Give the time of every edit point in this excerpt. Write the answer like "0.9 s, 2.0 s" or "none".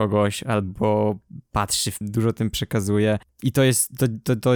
2.0 s